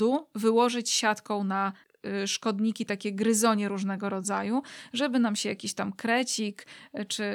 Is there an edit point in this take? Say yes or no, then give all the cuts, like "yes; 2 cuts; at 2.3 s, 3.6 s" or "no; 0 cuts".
no; 0 cuts